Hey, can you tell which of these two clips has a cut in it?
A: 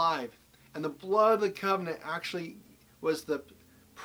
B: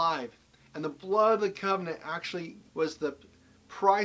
B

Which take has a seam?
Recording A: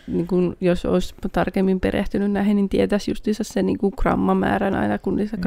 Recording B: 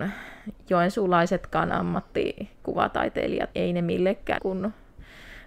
B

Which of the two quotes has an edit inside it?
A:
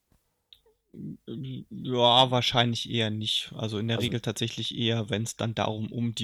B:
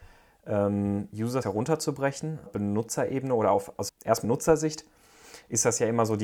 B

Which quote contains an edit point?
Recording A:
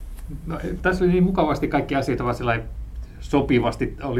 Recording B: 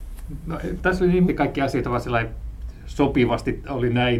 B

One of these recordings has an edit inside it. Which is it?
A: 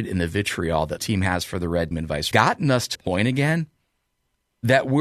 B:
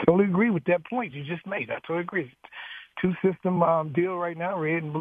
A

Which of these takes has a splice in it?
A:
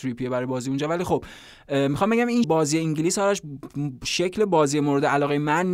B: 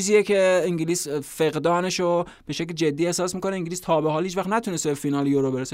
A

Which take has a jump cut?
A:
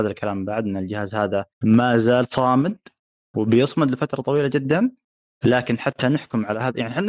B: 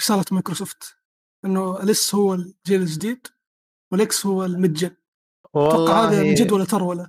A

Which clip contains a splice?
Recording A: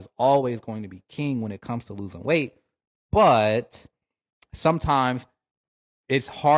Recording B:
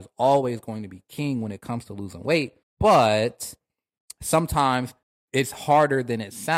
B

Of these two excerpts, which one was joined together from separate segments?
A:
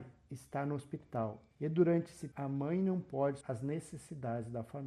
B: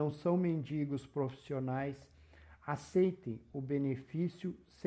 A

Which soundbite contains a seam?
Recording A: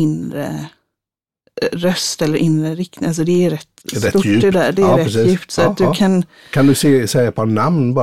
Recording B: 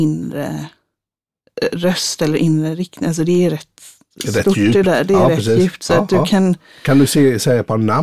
A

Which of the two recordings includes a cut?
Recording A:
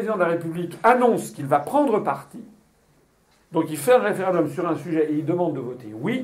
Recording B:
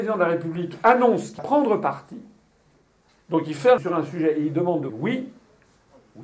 B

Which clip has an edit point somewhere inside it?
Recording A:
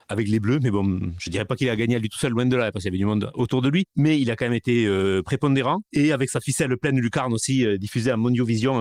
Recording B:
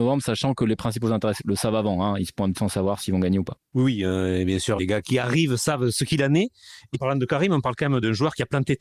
B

